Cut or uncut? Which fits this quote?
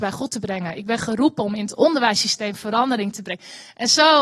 uncut